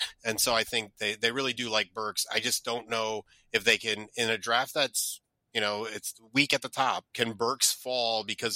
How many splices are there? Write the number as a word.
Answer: one